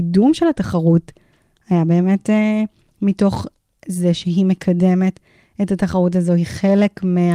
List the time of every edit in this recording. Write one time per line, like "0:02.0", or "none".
none